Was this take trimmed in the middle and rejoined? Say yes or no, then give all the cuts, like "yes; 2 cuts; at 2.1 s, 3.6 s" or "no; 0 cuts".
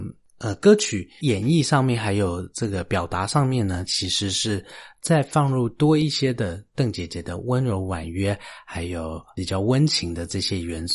no; 0 cuts